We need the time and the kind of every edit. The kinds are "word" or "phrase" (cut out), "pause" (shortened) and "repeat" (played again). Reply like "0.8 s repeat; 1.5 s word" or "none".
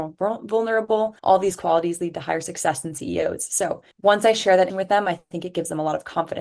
1.2 s pause; 3.9 s pause; 4.7 s word